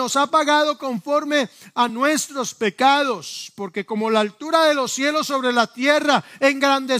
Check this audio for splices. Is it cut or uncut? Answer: uncut